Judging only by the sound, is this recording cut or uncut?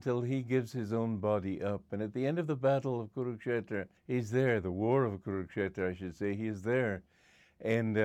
cut